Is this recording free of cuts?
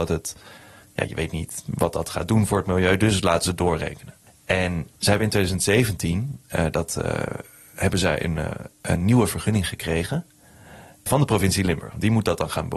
yes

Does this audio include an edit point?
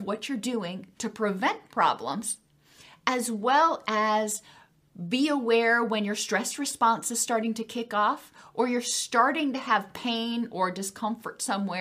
no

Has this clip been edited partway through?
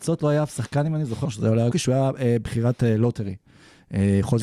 yes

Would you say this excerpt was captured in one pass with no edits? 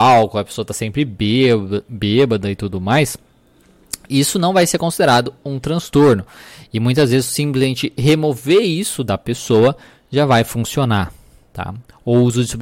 yes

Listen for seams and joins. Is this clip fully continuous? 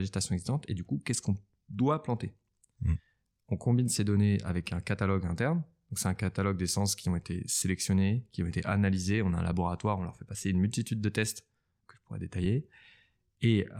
no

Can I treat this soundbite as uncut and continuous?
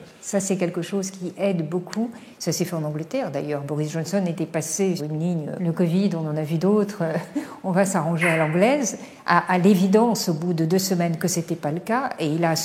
no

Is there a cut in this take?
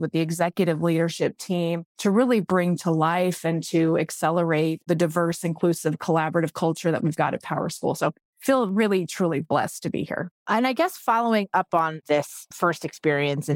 yes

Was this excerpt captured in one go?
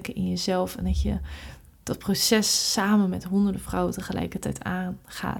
yes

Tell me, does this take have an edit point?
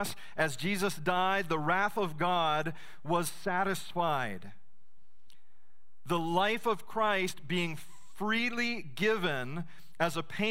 no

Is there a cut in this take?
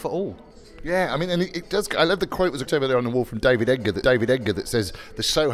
yes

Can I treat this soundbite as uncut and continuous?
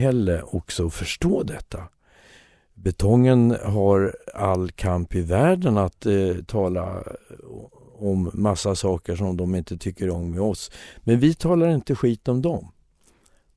yes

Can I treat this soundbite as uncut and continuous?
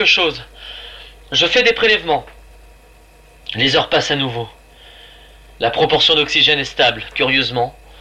yes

